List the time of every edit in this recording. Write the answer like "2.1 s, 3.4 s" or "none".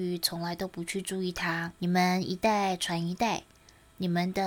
1.8 s